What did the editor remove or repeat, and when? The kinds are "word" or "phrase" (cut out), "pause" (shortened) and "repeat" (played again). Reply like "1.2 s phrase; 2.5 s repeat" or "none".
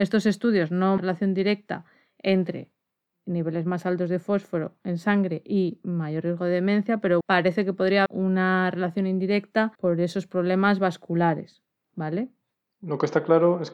1.0 s phrase; 7.2 s word; 8.1 s word; 9.7 s pause